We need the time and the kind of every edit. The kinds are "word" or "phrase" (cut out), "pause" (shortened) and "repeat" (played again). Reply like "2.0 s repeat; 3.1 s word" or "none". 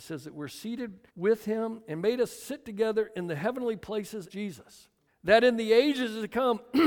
1.1 s pause; 4.3 s phrase; 5.1 s pause